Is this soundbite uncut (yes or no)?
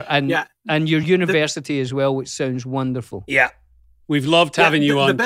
yes